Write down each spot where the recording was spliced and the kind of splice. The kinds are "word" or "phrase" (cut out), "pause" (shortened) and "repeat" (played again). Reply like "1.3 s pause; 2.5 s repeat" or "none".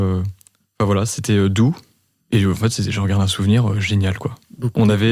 none